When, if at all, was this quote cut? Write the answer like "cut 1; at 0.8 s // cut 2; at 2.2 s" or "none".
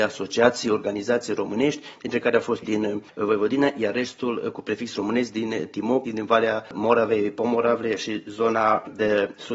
cut 1; at 2.6 s // cut 2; at 6.1 s

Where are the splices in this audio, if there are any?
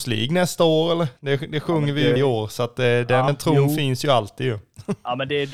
cut 1; at 1.2 s // cut 2; at 2.2 s // cut 3; at 3.3 s

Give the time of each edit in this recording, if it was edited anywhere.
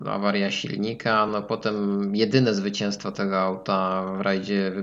none

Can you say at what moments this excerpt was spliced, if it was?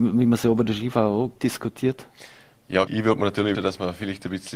cut 1; at 1.4 s // cut 2; at 2.9 s // cut 3; at 3.5 s

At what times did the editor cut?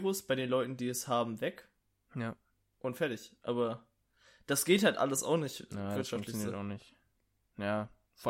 none

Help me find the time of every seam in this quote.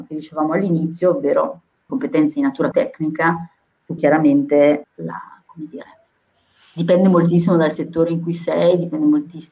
cut 1; at 1.9 s // cut 2; at 2.7 s // cut 3; at 4.0 s // cut 4; at 4.8 s

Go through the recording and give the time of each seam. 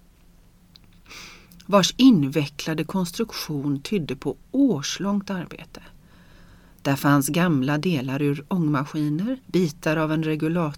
cut 1; at 9.4 s

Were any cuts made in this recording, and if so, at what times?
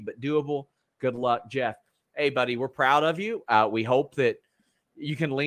none

